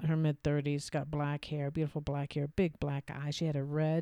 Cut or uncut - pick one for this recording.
uncut